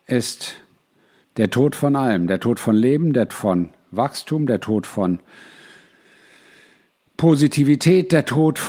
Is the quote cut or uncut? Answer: cut